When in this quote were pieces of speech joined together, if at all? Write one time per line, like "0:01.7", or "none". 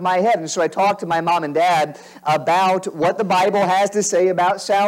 none